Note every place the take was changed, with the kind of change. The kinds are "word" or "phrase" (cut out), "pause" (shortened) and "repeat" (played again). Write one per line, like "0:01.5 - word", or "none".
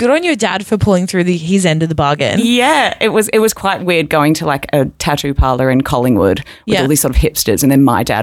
none